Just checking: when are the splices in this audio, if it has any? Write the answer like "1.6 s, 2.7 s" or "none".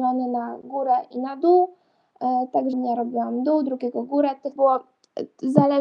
2.7 s, 4.6 s